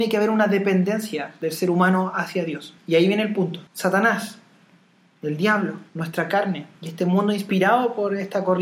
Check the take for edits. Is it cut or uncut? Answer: cut